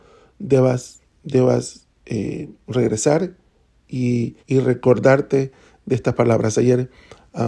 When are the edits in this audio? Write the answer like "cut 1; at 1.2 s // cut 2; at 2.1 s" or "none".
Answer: cut 1; at 4.4 s